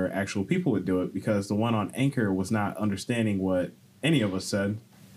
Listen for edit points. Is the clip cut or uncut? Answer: uncut